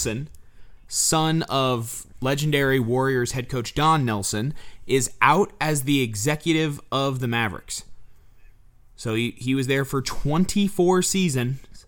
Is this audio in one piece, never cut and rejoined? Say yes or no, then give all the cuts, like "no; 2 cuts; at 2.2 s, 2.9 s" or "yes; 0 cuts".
yes; 0 cuts